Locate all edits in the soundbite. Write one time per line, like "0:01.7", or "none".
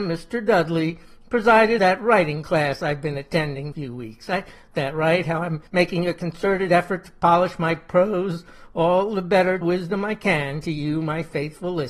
0:01.8
0:03.7
0:04.7
0:05.7
0:09.6